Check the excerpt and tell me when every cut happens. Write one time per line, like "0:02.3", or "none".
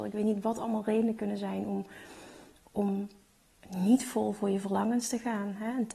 none

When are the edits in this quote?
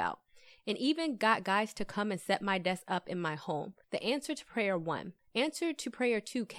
0:03.8

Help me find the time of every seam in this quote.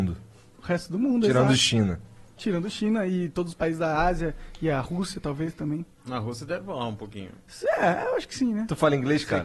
0:05.9

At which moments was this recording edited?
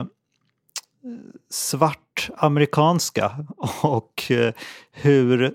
none

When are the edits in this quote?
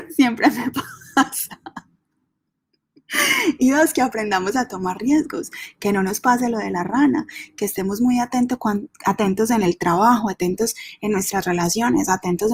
none

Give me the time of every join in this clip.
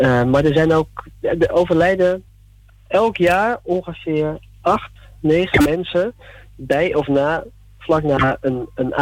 none

